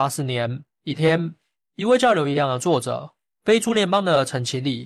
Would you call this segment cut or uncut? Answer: uncut